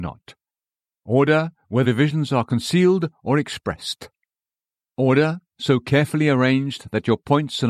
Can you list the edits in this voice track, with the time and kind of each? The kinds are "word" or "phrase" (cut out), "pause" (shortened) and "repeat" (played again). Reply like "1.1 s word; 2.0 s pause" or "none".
1.8 s word